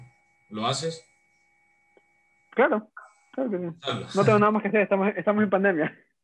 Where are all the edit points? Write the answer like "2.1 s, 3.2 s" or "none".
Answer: none